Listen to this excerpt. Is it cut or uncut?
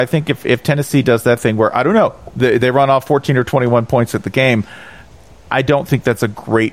uncut